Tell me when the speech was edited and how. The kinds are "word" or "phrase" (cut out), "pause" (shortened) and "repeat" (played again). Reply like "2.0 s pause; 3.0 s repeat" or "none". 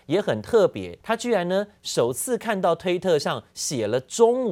1.0 s pause